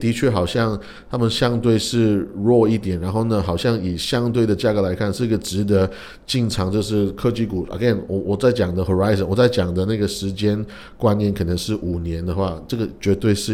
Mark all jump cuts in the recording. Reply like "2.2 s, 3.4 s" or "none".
none